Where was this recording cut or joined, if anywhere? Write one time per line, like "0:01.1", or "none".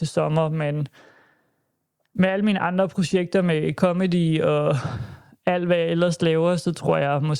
none